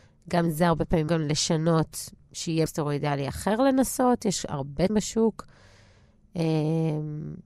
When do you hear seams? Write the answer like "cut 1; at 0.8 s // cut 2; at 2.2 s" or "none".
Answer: cut 1; at 1.1 s // cut 2; at 2.7 s // cut 3; at 4.9 s